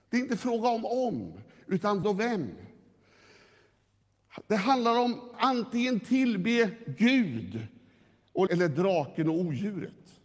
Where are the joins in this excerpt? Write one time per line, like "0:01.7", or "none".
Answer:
0:02.0
0:05.3
0:08.5

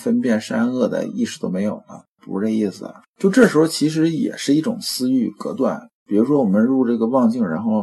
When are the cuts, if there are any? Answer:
0:03.1
0:05.9

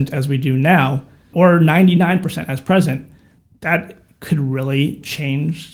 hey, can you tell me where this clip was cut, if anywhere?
0:01.3

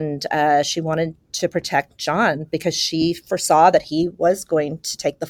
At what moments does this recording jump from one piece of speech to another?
none

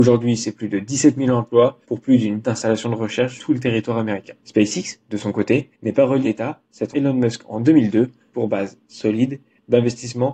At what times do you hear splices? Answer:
0:01.8
0:02.4
0:03.4
0:04.4
0:05.7
0:06.2
0:06.9
0:08.3

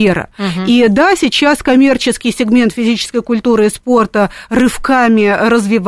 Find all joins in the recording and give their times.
none

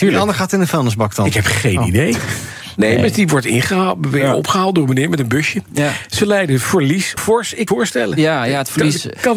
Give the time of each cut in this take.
0:07.2
0:07.7

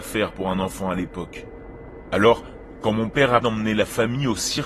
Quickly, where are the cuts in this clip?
0:03.4

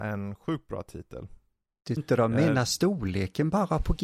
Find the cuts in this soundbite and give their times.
0:02.0

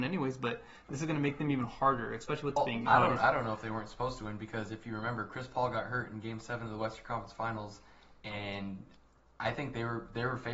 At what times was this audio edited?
0:02.6

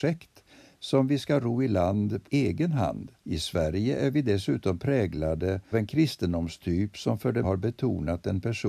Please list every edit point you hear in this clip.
0:02.2
0:03.2
0:05.7
0:07.4

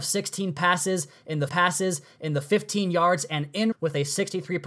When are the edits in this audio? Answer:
0:01.5
0:03.7

